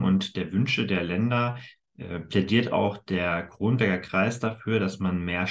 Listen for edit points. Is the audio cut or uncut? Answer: uncut